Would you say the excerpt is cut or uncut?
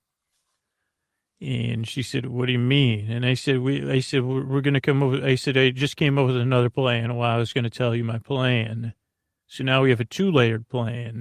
uncut